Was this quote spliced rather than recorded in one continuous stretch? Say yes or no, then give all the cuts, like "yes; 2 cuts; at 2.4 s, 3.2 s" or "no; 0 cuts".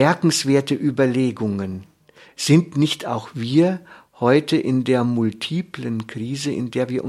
no; 0 cuts